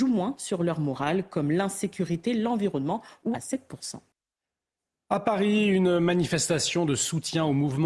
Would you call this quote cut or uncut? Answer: cut